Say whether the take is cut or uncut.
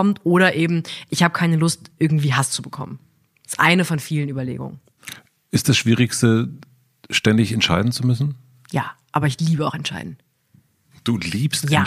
uncut